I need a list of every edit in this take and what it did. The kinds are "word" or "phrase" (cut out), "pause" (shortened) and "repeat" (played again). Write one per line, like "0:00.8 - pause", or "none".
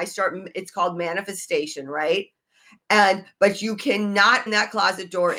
0:04.5 - word